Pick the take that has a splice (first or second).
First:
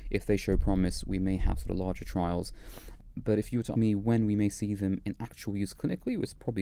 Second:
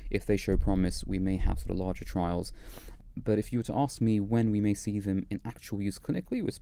first